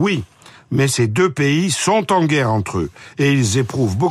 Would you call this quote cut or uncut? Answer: uncut